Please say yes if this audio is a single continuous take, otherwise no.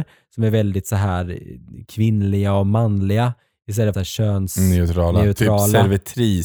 no